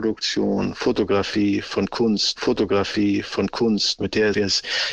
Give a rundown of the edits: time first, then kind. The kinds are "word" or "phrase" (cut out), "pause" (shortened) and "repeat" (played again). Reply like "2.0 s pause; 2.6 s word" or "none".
2.4 s repeat